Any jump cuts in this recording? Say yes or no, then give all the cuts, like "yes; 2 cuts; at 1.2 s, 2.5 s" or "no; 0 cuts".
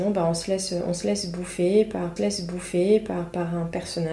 yes; 1 cut; at 2.2 s